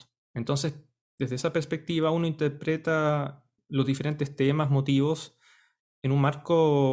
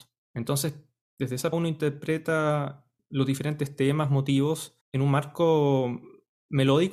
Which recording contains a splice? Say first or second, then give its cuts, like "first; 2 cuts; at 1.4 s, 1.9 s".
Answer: second; 2 cuts; at 1.5 s, 4.8 s